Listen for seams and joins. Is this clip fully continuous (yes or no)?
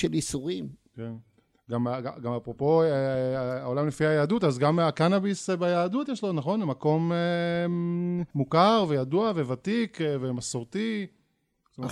no